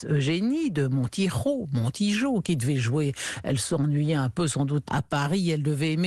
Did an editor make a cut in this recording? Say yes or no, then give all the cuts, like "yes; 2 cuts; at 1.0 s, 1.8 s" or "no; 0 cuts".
yes; 1 cut; at 4.8 s